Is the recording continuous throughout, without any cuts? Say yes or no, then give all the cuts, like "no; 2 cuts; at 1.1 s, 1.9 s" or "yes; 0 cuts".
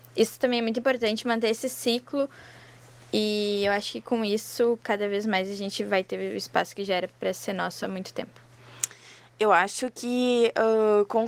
yes; 0 cuts